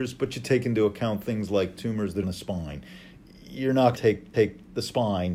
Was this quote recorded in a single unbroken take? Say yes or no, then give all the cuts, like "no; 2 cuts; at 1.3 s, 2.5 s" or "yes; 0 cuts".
no; 4 cuts; at 1.8 s, 2.2 s, 3.9 s, 4.3 s